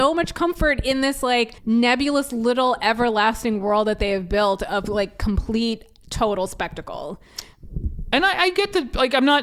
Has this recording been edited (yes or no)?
yes